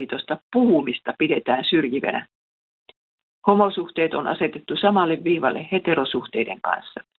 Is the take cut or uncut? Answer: uncut